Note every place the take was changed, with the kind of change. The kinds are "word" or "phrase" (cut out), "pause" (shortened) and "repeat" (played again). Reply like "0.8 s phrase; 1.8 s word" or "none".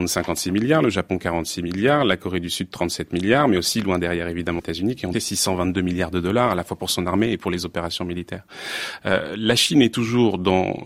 4.6 s word; 5.1 s word